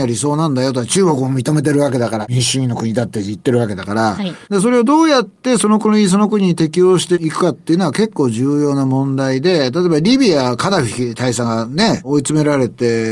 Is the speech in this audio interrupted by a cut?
yes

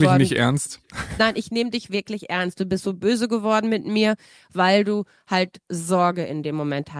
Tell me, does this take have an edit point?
no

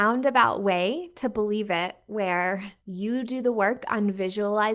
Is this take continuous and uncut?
no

